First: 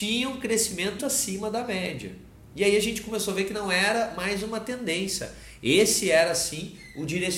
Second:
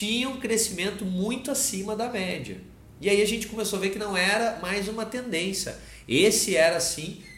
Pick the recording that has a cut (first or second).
first